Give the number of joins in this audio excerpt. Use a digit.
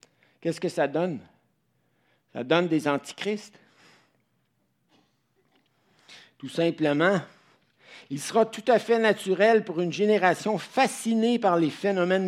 0